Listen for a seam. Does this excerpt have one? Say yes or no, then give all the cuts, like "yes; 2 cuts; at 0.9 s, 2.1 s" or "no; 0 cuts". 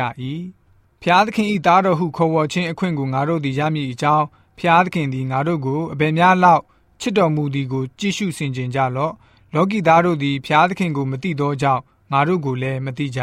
no; 0 cuts